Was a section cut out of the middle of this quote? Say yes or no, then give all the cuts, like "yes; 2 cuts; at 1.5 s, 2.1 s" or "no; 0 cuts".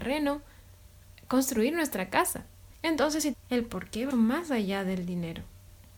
yes; 3 cuts; at 2.7 s, 3.3 s, 4.1 s